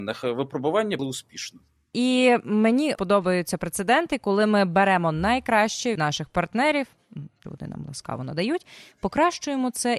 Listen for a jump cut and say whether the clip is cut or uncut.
cut